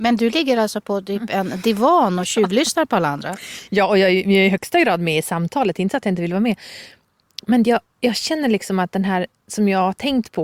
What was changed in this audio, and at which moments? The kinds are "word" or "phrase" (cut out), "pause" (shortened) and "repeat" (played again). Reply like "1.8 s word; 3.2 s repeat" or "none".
none